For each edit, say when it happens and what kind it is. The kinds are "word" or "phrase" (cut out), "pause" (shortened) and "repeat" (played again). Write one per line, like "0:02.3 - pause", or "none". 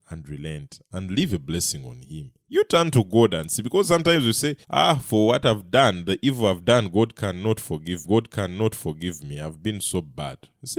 0:02.4 - pause
0:04.6 - pause
0:08.0 - repeat